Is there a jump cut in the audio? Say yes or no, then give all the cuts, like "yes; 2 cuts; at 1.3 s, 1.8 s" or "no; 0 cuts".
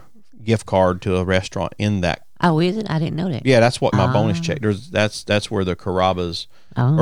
yes; 1 cut; at 3.9 s